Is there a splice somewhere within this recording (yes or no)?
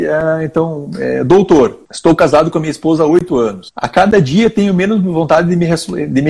no